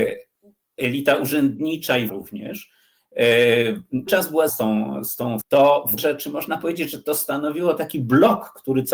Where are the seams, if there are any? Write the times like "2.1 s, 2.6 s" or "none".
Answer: 2.1 s, 4.1 s, 4.5 s, 5.4 s, 6.0 s